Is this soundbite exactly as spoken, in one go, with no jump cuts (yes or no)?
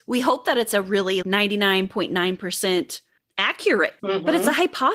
no